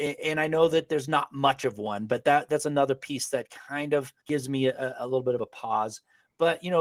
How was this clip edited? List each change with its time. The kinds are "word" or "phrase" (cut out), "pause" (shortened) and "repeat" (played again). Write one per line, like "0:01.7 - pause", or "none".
0:04.2 - pause